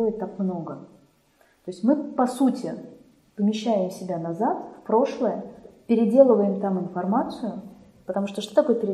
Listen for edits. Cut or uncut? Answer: uncut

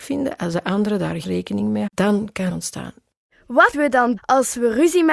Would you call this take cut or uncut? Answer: cut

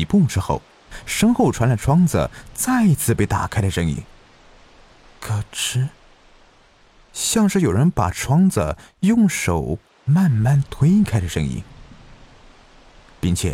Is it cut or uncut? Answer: uncut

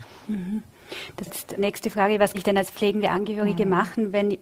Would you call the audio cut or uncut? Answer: cut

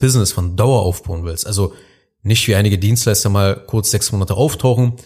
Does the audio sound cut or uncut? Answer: uncut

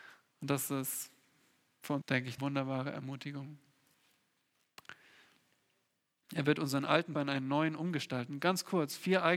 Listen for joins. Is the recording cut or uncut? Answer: cut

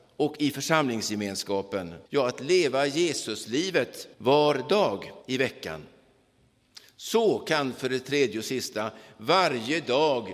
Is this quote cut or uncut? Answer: cut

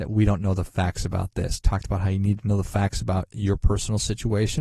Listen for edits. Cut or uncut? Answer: uncut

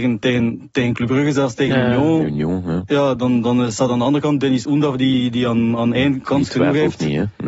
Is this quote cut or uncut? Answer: uncut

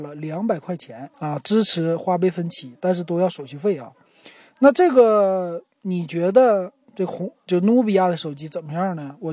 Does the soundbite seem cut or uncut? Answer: cut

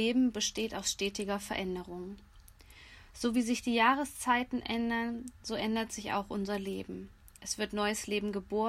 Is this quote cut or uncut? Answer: uncut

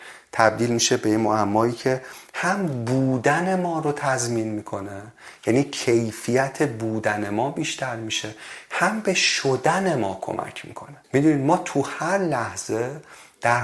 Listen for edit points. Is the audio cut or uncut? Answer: cut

